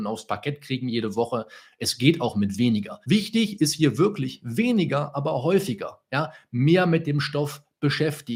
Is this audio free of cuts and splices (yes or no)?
no